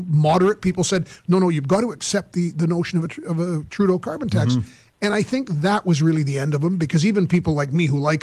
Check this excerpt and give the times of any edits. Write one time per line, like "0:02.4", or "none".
none